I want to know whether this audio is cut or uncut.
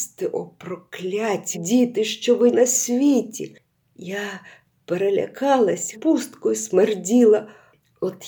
cut